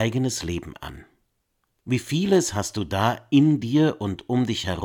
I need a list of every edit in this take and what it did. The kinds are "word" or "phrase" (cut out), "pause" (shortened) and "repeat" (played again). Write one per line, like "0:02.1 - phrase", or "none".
none

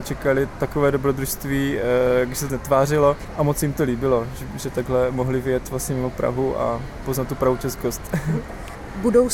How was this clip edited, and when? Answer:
0:02.5 - phrase
0:07.0 - word

